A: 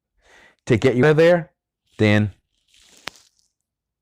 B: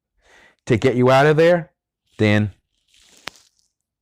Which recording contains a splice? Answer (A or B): A